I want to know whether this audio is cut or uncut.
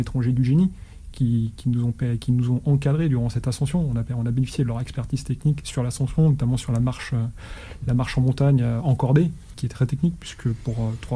cut